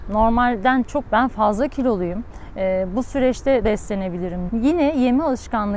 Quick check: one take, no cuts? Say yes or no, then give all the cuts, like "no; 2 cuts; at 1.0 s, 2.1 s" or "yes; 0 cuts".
no; 3 cuts; at 1.1 s, 3.6 s, 4.5 s